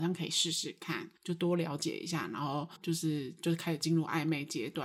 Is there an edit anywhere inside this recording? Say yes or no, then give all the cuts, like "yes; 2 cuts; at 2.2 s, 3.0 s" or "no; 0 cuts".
yes; 2 cuts; at 1.2 s, 2.8 s